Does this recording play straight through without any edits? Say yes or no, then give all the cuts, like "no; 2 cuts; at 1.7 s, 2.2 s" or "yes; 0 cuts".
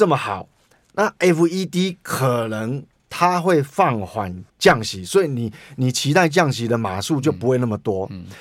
no; 1 cut; at 4.5 s